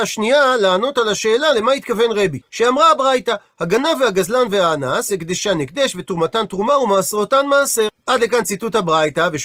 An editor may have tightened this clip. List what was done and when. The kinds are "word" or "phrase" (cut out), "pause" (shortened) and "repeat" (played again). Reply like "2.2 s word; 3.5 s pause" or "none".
2.5 s pause; 8.0 s pause